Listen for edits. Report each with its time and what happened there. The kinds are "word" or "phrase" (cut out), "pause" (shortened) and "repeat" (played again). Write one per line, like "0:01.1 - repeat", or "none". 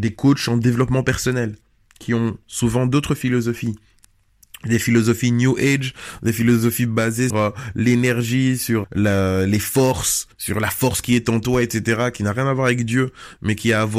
0:07.3 - word
0:08.8 - word
0:10.3 - pause